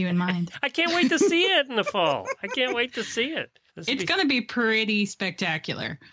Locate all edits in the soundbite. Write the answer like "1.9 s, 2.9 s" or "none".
3.7 s